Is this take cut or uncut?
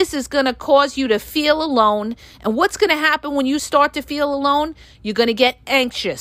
uncut